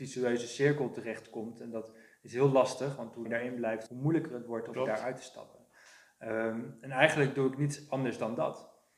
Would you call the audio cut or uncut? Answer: cut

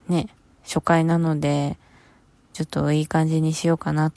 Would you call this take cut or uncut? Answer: uncut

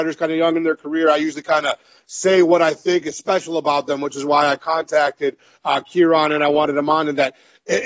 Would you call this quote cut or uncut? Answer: uncut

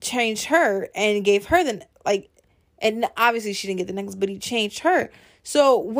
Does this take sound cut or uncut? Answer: uncut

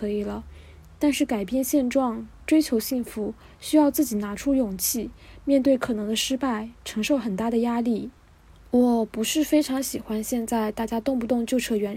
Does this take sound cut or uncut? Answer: uncut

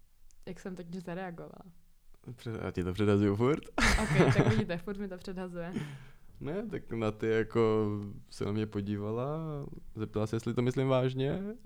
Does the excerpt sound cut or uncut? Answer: uncut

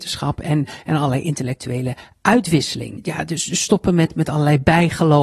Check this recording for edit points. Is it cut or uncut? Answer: uncut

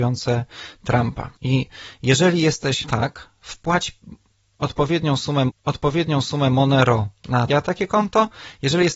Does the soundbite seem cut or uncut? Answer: cut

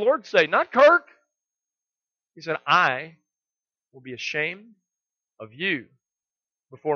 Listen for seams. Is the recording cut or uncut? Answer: uncut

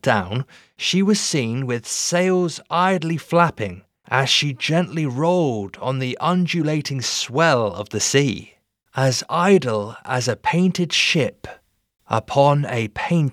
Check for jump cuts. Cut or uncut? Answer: uncut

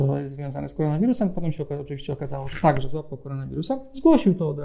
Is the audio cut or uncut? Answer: uncut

